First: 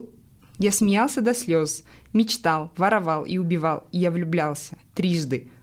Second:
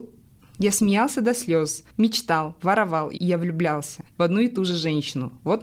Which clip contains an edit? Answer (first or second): second